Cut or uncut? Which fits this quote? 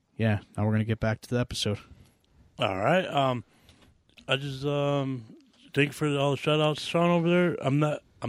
uncut